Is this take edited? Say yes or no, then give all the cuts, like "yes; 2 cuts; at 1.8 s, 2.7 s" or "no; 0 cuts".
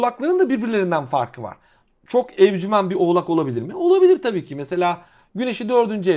no; 0 cuts